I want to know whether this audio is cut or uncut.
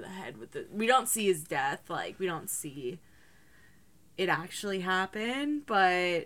uncut